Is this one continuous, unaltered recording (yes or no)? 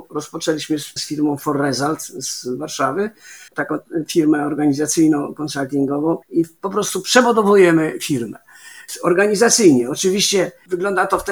no